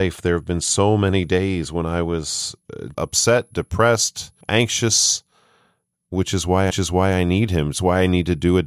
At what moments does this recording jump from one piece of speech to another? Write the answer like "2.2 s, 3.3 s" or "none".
2.9 s, 4.4 s, 6.7 s

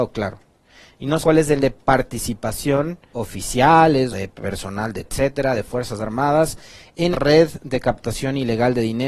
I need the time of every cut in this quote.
1.2 s, 1.6 s, 3.1 s, 4.1 s, 5.0 s, 7.1 s

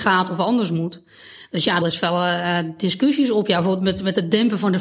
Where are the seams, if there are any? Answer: 1.8 s

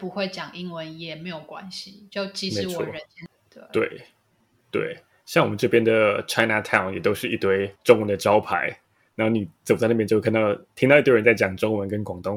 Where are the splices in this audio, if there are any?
7.8 s

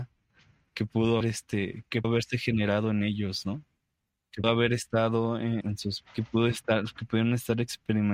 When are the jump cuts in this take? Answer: 1.2 s, 2.0 s, 4.4 s, 5.6 s, 6.0 s

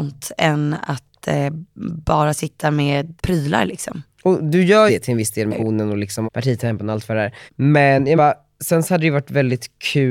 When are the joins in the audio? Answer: 3.2 s, 4.1 s, 4.9 s, 5.5 s, 6.2 s, 7.5 s, 8.2 s

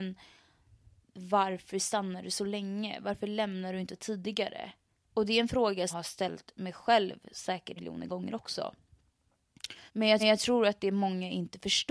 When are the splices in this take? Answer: 4.9 s, 5.9 s, 7.8 s, 9.9 s, 10.2 s

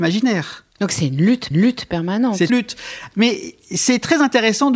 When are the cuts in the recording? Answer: 1.5 s, 2.5 s

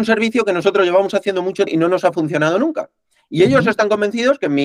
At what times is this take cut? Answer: 1.7 s

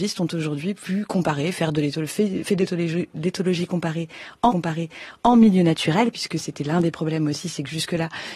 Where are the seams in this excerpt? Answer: 4.5 s

